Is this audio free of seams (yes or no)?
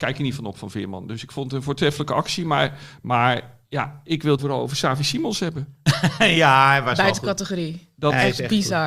no